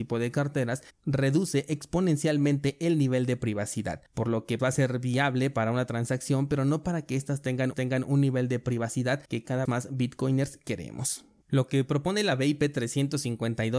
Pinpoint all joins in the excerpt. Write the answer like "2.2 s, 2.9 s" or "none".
4.1 s, 4.6 s, 7.7 s, 9.3 s, 9.7 s